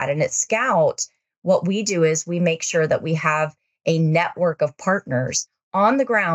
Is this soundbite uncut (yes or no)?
yes